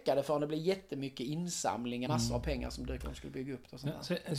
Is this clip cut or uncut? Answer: cut